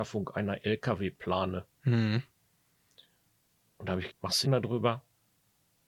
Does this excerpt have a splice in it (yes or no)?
yes